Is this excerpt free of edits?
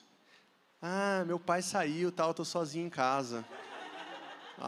yes; 0 cuts

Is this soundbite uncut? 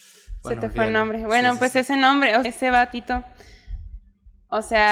no; 1 cut; at 2.4 s

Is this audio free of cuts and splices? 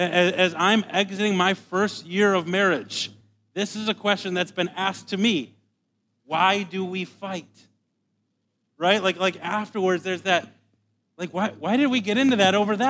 yes; 0 cuts

